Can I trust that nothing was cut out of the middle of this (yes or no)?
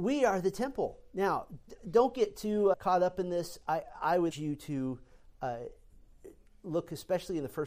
no